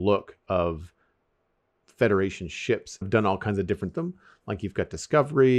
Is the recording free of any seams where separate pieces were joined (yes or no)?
no